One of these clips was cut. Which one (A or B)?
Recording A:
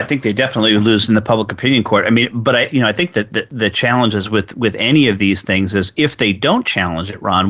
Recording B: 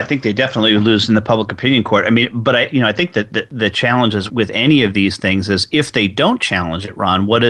B